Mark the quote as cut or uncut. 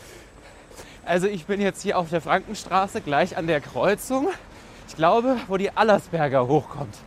uncut